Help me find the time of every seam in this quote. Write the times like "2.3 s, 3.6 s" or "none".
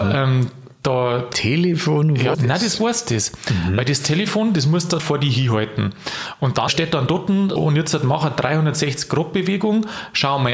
1.3 s, 2.3 s, 5.0 s, 6.7 s, 7.6 s